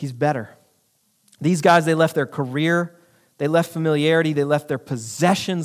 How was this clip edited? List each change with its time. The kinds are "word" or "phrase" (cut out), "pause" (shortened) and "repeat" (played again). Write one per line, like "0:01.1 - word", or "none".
none